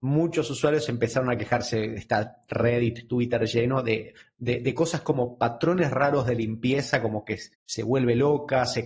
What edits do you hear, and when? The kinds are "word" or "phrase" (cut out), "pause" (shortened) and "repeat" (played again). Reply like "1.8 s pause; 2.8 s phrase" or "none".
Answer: 7.5 s pause